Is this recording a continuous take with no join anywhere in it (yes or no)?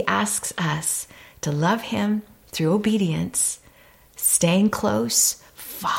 yes